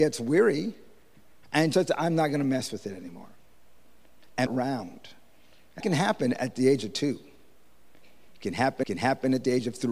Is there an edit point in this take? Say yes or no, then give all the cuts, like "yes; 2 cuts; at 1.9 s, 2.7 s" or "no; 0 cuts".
yes; 4 cuts; at 1.7 s, 4.5 s, 5.8 s, 8.8 s